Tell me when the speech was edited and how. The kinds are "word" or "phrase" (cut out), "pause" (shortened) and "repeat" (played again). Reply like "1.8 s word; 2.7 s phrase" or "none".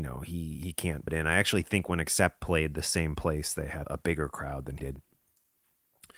1.1 s word; 3.8 s word; 4.8 s word